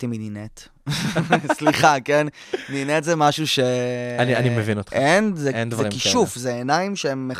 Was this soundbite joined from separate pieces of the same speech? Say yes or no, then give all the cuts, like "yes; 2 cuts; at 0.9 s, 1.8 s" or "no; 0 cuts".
no; 0 cuts